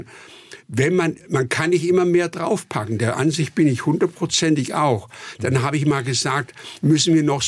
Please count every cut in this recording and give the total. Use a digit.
0